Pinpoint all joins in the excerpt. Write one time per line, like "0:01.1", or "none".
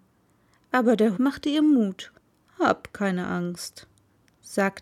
0:01.2
0:02.3